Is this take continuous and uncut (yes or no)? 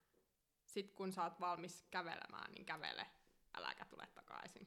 yes